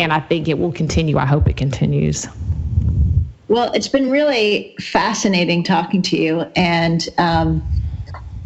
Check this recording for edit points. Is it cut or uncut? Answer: uncut